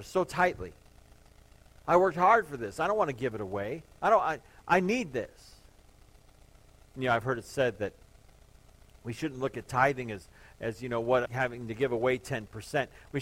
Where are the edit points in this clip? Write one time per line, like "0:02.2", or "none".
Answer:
0:11.3